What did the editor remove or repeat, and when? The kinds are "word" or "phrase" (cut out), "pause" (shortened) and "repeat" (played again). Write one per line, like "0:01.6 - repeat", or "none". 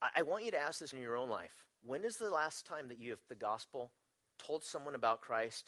0:00.9 - word
0:01.7 - pause
0:03.3 - word